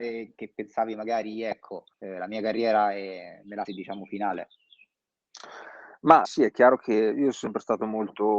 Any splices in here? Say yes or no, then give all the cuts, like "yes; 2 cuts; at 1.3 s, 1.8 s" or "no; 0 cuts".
yes; 3 cuts; at 1.9 s, 3.6 s, 6.2 s